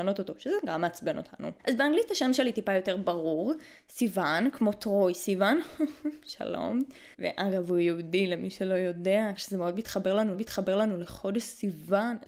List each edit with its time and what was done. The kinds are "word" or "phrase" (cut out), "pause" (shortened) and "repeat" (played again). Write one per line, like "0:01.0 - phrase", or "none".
0:01.6 - pause
0:07.1 - pause
0:09.4 - word
0:10.3 - repeat